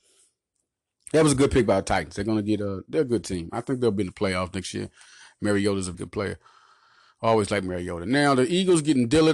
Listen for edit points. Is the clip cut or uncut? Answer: cut